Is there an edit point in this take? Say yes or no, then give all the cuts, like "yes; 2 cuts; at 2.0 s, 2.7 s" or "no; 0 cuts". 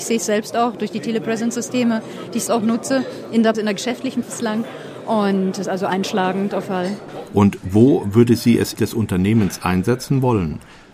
yes; 6 cuts; at 2.5 s, 3.5 s, 4.2 s, 5.6 s, 6.6 s, 8.7 s